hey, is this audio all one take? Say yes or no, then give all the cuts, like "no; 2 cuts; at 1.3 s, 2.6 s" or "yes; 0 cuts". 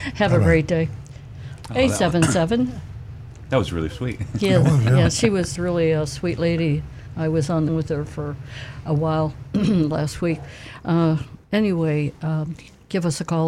no; 3 cuts; at 5.6 s, 7.7 s, 11.4 s